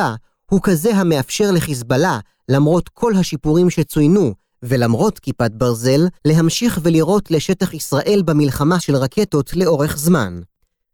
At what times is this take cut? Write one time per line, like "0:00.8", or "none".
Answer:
0:06.2
0:08.8